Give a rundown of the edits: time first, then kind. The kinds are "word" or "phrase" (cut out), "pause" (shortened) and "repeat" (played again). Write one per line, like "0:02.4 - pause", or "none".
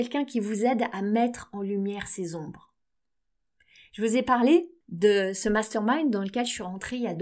none

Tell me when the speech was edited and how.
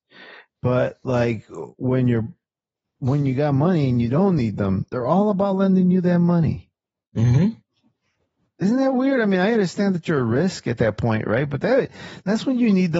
none

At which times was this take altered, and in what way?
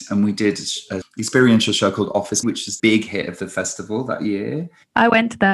0:01.0 - word
0:02.4 - word
0:02.8 - word

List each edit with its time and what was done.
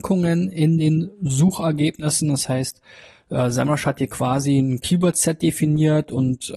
none

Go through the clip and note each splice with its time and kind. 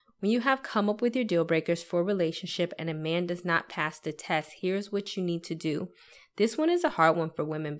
none

